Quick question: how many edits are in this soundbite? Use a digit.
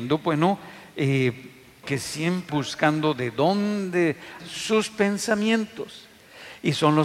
3